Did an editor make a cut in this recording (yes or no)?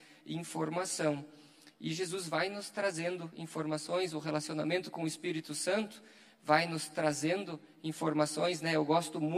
no